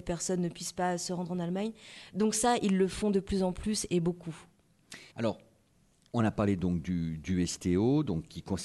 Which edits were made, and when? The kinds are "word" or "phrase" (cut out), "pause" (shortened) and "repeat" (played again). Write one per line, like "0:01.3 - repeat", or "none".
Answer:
0:05.1 - pause

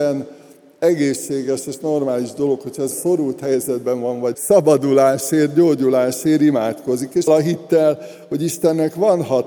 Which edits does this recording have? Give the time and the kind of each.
0:02.9 - word
0:04.3 - phrase
0:07.3 - word

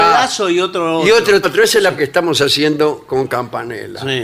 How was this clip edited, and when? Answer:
0:01.4 - word
0:02.0 - word

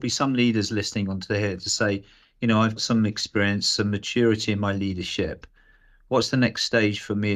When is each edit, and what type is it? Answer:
0:02.8 - word

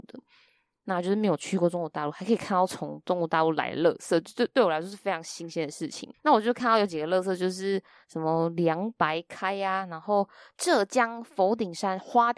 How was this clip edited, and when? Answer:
0:06.1 - pause

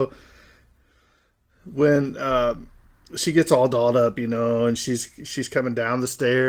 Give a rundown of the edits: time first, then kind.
none

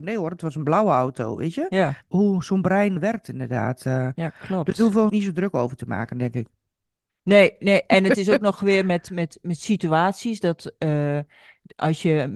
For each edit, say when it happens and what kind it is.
0:02.1 - phrase
0:03.0 - word
0:05.1 - phrase

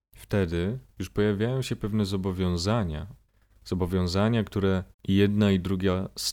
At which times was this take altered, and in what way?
0:00.9 - pause
0:04.9 - pause

